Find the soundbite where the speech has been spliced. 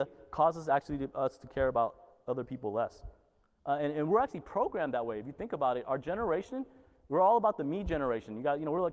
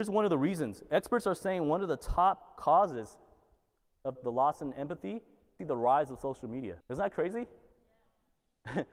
second; 3 cuts; at 4.1 s, 5.6 s, 6.8 s

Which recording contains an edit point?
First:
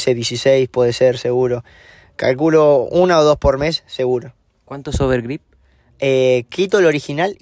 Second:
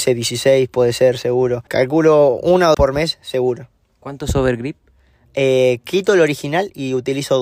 second; 2 cuts; at 1.7 s, 2.7 s

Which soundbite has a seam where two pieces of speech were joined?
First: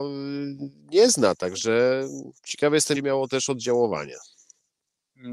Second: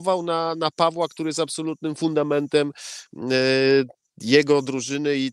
first; 2 cuts; at 2.4 s, 2.9 s

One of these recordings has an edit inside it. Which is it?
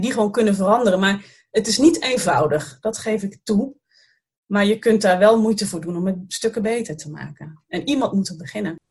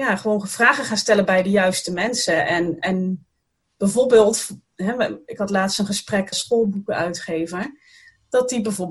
second; 2 cuts; at 2.8 s, 6.3 s

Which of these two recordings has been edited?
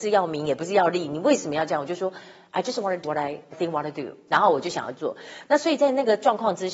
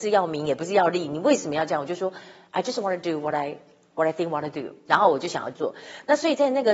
first; 2 cuts; at 3.0 s, 3.5 s

